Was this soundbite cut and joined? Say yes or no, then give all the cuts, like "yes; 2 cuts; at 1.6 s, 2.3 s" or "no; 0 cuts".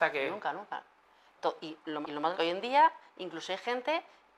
yes; 2 cuts; at 2.0 s, 2.3 s